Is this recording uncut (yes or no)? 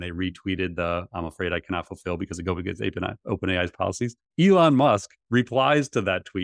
no